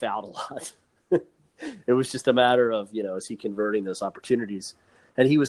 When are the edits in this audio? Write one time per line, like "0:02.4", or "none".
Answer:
none